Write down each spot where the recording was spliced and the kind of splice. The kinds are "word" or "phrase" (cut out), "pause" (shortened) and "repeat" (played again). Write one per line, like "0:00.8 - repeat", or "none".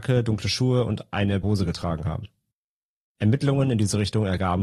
0:01.4 - word